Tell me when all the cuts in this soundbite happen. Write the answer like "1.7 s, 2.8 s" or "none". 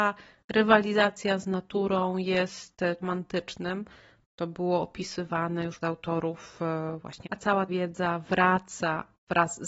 3.0 s, 5.8 s, 7.2 s, 7.7 s